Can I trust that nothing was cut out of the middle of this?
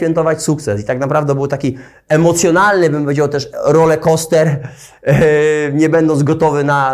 yes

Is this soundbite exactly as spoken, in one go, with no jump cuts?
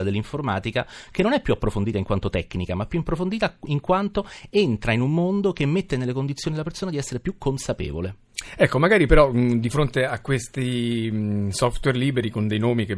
yes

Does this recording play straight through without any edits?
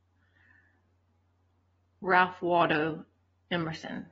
yes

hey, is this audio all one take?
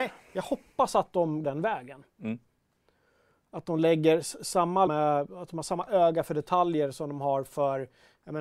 no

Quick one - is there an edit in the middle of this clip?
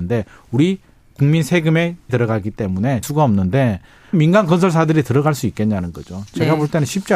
yes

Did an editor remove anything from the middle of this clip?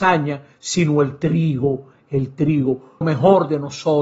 yes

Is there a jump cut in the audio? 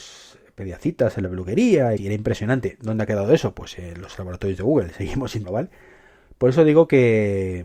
yes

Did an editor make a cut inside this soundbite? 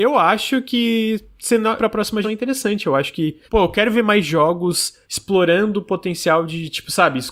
yes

